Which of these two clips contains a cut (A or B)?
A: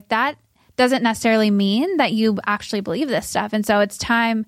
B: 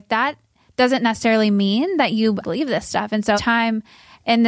B